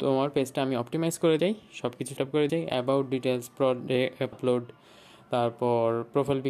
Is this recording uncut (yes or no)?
no